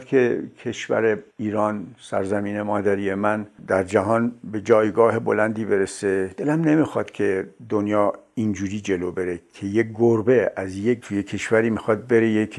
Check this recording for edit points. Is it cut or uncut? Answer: cut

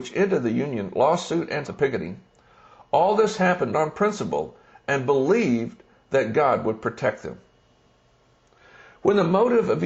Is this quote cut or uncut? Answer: cut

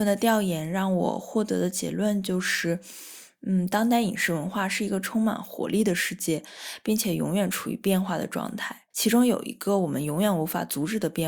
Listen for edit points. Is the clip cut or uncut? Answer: cut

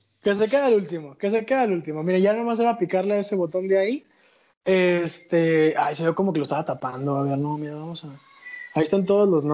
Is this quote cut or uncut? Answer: uncut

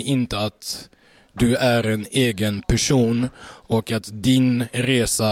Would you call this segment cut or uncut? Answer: uncut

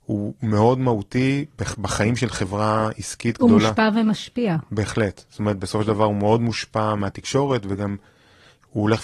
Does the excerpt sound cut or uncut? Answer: uncut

